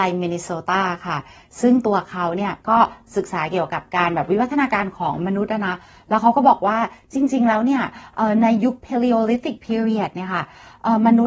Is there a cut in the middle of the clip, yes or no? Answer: yes